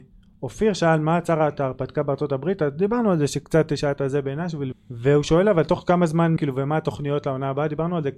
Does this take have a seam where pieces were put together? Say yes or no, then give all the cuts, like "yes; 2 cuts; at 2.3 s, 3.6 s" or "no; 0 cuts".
yes; 2 cuts; at 4.7 s, 6.4 s